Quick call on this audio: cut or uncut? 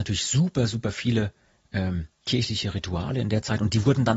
uncut